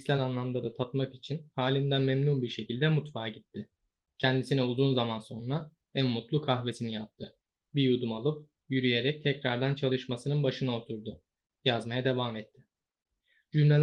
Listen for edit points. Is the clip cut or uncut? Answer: uncut